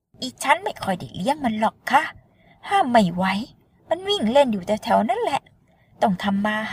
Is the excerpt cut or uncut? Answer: uncut